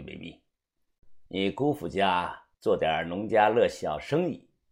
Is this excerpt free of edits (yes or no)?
no